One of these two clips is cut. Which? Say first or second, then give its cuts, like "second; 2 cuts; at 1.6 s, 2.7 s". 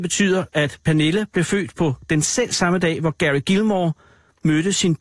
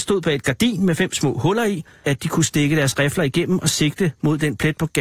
second; 1 cut; at 2.0 s